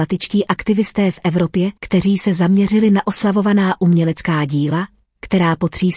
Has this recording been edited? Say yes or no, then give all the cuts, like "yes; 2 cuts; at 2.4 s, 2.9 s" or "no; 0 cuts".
yes; 1 cut; at 1.8 s